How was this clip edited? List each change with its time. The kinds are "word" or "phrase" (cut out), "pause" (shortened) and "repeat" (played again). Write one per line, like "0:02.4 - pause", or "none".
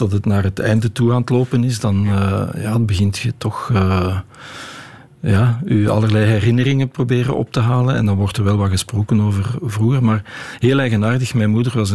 none